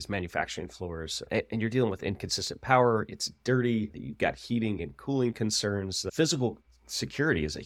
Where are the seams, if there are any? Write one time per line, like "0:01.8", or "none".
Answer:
none